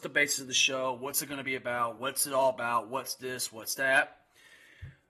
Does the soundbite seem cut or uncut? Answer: uncut